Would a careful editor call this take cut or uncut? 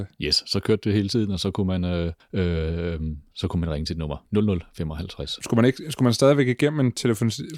cut